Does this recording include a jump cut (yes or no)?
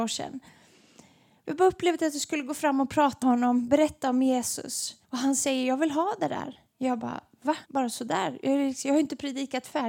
yes